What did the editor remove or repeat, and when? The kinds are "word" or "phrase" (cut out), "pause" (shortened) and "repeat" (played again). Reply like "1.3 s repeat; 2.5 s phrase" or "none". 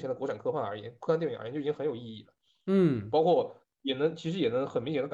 none